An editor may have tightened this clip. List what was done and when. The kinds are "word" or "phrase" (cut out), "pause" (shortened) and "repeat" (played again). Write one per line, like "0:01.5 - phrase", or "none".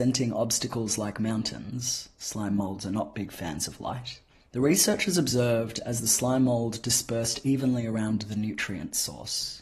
0:04.3 - pause